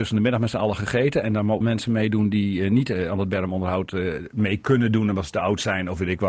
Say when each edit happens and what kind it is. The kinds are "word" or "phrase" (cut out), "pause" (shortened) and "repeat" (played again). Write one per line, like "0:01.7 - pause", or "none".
0:01.6 - phrase

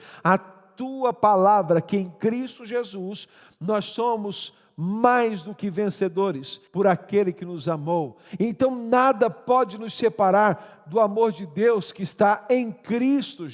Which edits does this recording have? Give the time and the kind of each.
0:06.7 - pause

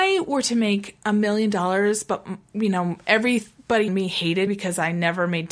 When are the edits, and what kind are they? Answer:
0:03.9 - word
0:04.5 - word

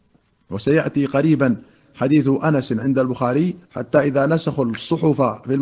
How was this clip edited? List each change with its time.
0:03.6 - pause

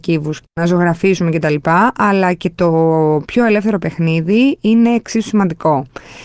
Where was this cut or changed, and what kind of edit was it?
none

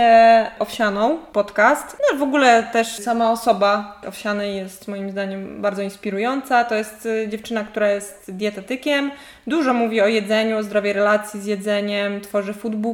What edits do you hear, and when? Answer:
0:03.0 - word
0:04.0 - word

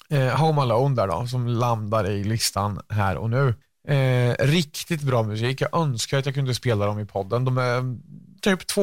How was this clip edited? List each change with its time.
0:03.6 - pause

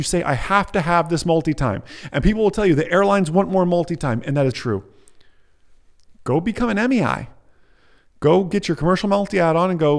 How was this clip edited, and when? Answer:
0:04.5 - word

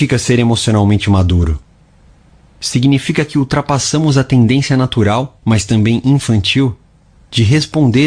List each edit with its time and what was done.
none

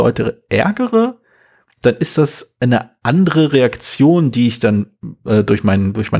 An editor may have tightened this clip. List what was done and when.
none

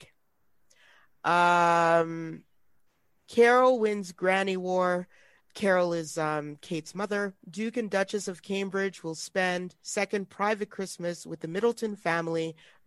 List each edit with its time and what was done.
0:02.9 - pause
0:05.4 - pause
0:07.4 - pause
0:09.8 - pause

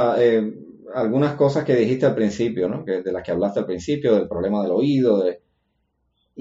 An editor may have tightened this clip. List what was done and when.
none

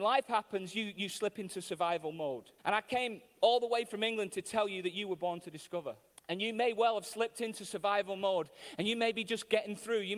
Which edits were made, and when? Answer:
0:02.6 - pause
0:06.1 - pause

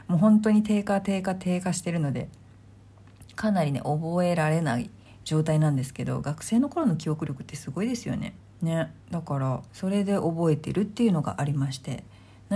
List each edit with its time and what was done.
0:05.1 - pause
0:08.4 - pause
0:09.7 - pause

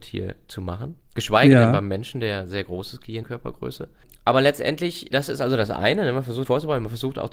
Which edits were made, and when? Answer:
0:03.2 - phrase
0:05.1 - word
0:06.4 - word

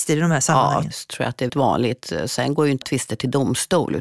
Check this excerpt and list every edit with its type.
0:00.9 - word
0:01.5 - word
0:02.8 - word

